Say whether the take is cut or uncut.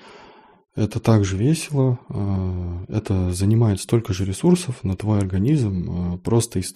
uncut